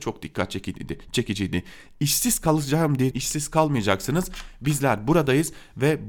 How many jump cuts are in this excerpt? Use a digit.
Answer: 1